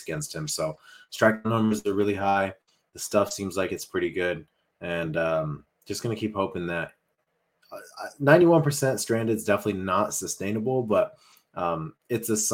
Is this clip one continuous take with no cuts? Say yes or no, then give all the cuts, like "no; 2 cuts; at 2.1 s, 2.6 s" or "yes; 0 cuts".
yes; 0 cuts